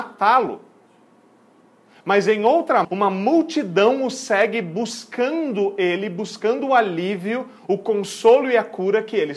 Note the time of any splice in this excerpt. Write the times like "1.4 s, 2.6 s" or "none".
2.8 s